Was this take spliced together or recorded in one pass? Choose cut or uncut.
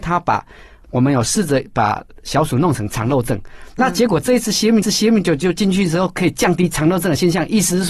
cut